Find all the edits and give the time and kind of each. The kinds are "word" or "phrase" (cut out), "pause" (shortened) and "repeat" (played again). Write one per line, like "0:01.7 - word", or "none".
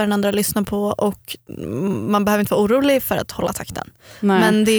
none